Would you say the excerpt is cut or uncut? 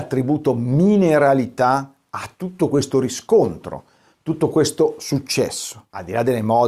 uncut